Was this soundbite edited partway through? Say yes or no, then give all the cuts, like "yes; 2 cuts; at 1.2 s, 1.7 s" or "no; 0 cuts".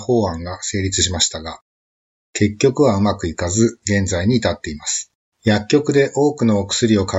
yes; 1 cut; at 5.3 s